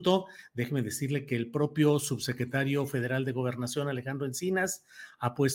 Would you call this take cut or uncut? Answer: uncut